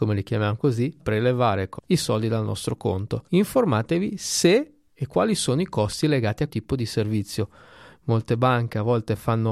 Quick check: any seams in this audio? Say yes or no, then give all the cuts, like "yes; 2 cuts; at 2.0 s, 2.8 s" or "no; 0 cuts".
yes; 4 cuts; at 1.0 s, 1.8 s, 3.3 s, 6.5 s